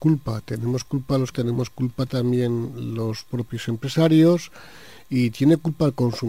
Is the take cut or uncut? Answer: cut